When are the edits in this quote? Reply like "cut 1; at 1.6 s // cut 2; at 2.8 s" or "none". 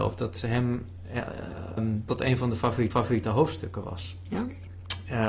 cut 1; at 1.8 s // cut 2; at 2.1 s // cut 3; at 2.9 s